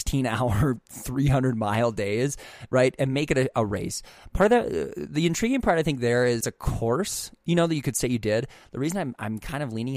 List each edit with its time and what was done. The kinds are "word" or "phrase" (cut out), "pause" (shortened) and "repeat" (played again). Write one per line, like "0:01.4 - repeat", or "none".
0:06.4 - phrase